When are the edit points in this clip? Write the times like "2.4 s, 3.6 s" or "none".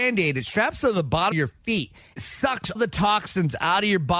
1.3 s, 2.2 s, 2.7 s